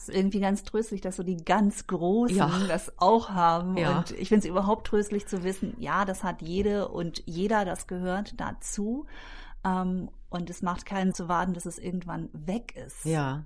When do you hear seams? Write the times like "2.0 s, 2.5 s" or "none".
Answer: 11.1 s